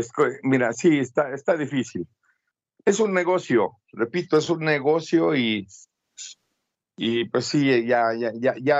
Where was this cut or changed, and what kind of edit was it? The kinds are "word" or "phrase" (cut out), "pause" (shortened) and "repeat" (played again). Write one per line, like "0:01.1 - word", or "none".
none